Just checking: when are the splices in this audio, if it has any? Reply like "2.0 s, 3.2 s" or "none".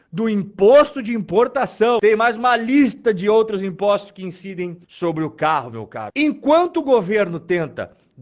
4.8 s